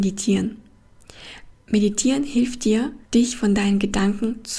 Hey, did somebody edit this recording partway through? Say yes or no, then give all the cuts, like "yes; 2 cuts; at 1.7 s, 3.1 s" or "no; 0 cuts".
yes; 2 cuts; at 1.5 s, 3.1 s